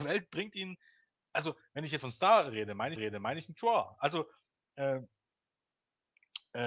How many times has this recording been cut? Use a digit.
2